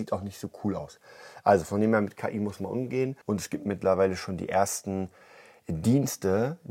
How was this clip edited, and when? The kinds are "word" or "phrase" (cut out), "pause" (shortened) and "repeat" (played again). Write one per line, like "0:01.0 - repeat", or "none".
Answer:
0:03.2 - pause